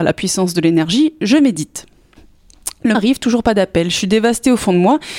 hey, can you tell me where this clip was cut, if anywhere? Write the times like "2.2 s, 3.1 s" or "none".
2.9 s